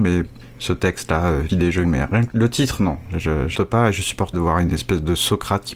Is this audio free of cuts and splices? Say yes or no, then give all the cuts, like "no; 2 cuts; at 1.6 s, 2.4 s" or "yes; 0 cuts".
no; 5 cuts; at 1.5 s, 1.8 s, 2.3 s, 3.6 s, 4.3 s